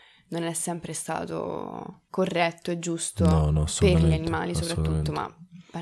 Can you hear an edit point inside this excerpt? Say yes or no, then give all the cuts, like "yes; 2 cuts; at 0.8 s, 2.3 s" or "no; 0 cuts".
no; 0 cuts